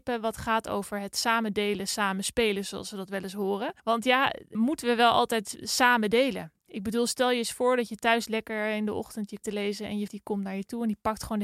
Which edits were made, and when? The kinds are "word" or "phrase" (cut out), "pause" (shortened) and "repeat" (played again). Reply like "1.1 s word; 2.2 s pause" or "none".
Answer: 3.8 s pause; 4.5 s word; 6.6 s pause; 9.4 s phrase; 10.1 s word